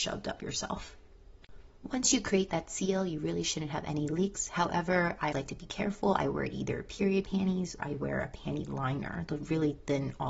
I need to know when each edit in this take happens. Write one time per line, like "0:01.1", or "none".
0:05.3
0:07.8